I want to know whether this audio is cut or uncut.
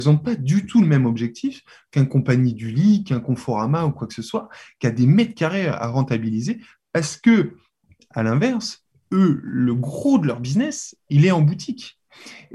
uncut